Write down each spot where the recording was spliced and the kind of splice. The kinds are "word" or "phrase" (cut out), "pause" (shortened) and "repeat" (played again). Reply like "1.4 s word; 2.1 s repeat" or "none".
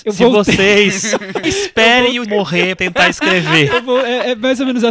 1.4 s word; 2.3 s word; 2.8 s word